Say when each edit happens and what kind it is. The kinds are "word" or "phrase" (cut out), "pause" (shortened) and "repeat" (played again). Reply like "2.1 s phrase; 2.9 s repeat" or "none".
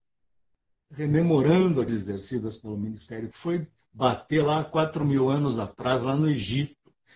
1.9 s phrase; 3.3 s word